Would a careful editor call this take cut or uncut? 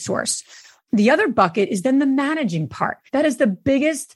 cut